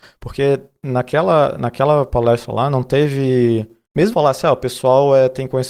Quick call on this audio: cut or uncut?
cut